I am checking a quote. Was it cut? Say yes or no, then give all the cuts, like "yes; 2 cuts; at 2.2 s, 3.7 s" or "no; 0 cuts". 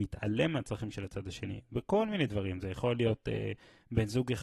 no; 0 cuts